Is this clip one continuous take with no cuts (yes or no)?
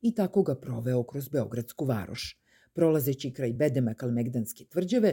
yes